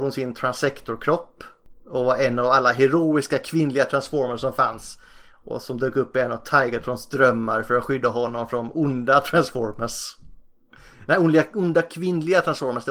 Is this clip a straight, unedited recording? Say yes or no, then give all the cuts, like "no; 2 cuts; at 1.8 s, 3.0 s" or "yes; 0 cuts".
yes; 0 cuts